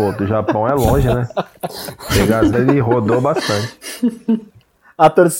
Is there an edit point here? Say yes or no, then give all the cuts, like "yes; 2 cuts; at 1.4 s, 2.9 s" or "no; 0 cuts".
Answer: yes; 1 cut; at 2.5 s